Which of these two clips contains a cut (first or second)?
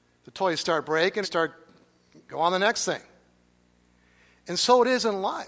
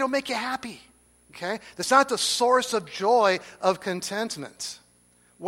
first